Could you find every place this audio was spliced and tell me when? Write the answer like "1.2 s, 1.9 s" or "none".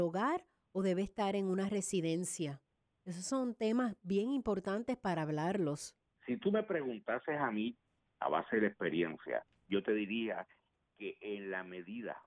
none